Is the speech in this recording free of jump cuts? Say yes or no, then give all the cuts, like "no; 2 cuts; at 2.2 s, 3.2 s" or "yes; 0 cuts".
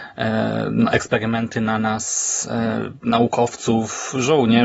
yes; 0 cuts